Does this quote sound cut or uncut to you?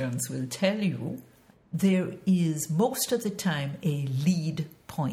uncut